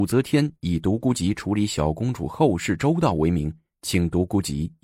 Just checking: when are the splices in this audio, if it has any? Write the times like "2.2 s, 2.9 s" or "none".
none

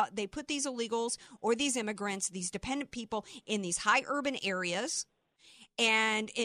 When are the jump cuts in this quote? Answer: none

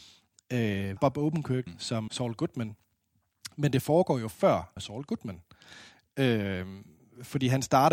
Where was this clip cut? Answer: 1.0 s, 1.7 s, 2.1 s, 4.8 s

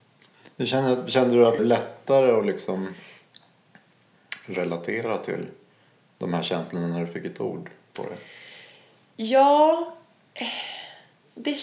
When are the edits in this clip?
1.6 s

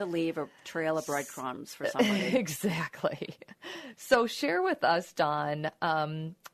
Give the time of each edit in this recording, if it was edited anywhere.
none

